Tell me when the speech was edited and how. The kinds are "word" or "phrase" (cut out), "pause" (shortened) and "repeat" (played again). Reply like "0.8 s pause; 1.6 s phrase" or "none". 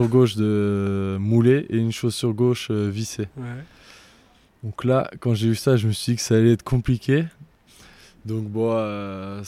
none